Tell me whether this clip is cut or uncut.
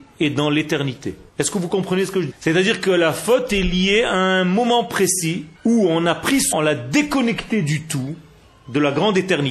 cut